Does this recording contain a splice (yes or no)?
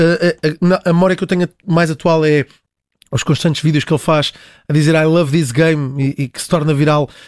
no